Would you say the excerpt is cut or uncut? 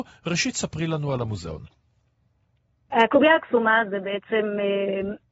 uncut